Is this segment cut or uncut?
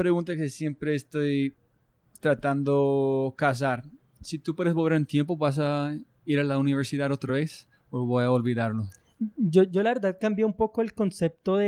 uncut